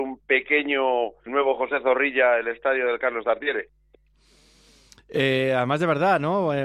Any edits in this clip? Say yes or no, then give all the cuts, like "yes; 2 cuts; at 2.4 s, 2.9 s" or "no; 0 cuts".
yes; 1 cut; at 1.3 s